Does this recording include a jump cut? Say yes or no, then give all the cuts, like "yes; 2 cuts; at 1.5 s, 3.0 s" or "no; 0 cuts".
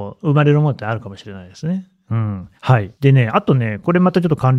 yes; 2 cuts; at 2.6 s, 2.9 s